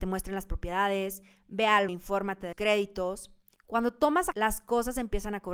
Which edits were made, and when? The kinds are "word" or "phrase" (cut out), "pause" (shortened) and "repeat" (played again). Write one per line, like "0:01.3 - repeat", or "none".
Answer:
0:01.9 - word
0:02.5 - word
0:04.3 - word